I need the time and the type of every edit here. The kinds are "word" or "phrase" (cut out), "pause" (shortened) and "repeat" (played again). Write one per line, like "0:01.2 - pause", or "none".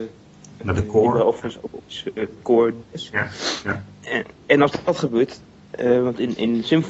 none